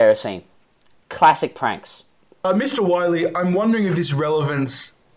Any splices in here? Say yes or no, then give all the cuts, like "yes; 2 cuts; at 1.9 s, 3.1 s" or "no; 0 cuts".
no; 0 cuts